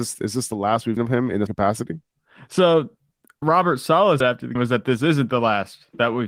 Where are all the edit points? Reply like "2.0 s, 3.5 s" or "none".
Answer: 1.0 s, 1.5 s, 3.4 s, 4.2 s, 4.6 s